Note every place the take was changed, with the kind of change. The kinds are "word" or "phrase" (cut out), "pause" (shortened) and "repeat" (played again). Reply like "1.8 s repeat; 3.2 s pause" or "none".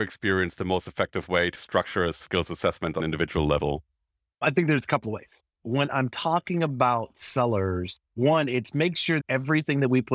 1.5 s word; 3.0 s word; 8.1 s pause; 9.2 s word